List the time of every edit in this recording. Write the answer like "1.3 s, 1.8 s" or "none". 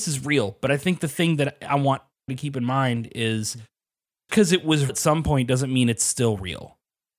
2.3 s, 4.3 s, 4.9 s